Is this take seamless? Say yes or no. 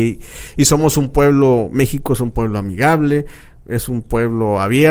yes